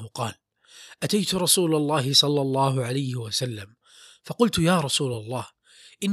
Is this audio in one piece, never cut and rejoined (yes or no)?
yes